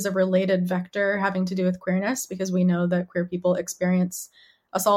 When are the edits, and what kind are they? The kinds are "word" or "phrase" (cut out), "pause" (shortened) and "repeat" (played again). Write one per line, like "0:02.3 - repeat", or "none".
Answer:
none